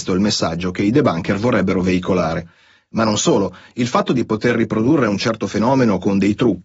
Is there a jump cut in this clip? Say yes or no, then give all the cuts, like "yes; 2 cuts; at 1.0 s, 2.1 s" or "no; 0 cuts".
no; 0 cuts